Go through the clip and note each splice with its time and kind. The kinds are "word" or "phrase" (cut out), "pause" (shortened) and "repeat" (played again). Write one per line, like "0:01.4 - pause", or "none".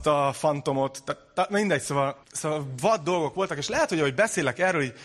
0:02.2 - pause

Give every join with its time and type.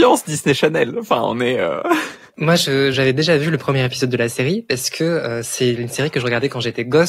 0:02.9 - word

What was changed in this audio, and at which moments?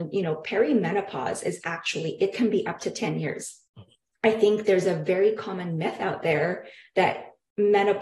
0:03.7 - pause

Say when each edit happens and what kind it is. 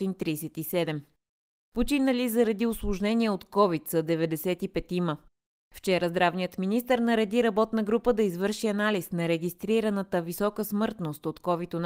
none

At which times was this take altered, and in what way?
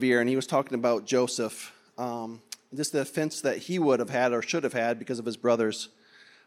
none

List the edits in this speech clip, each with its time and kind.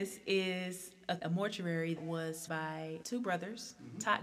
0:01.2 - word
0:02.0 - word
0:02.5 - word
0:03.0 - word

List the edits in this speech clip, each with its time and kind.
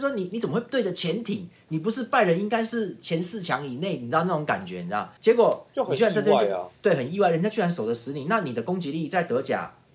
0:05.2 - pause
0:06.8 - pause

